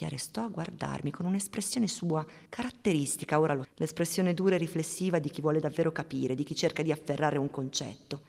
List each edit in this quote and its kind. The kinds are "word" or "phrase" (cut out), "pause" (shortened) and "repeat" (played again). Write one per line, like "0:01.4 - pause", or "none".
0:02.5 - pause
0:03.6 - word